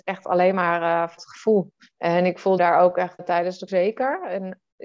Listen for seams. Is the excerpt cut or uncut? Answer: cut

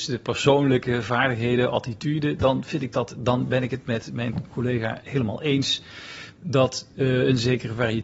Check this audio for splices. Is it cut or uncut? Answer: uncut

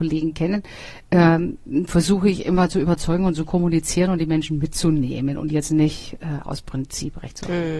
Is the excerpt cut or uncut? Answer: cut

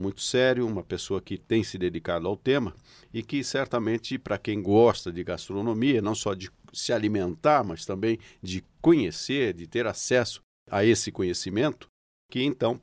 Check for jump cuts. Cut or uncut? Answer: uncut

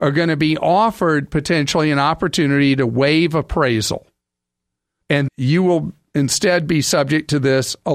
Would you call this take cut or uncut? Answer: cut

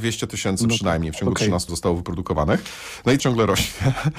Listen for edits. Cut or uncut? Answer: cut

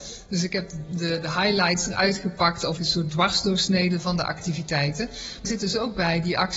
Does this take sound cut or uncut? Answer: cut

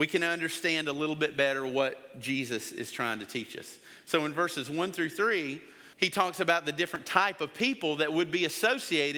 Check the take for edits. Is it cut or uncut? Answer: cut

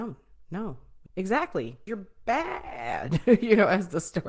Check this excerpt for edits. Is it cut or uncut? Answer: cut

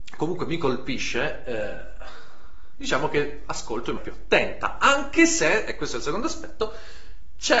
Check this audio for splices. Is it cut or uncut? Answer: cut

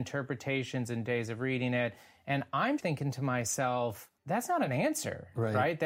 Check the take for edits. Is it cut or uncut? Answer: cut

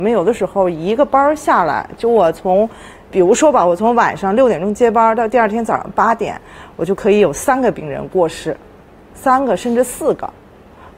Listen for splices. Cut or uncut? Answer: uncut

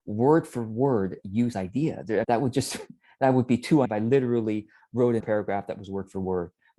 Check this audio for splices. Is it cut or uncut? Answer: cut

